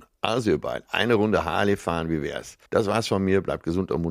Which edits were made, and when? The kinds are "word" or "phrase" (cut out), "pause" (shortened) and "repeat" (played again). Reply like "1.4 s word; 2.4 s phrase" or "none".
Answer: 2.7 s pause